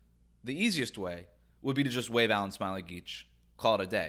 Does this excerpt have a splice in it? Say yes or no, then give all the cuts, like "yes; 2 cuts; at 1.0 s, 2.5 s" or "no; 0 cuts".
no; 0 cuts